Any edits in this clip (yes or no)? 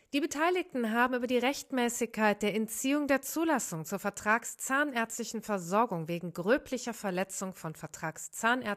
no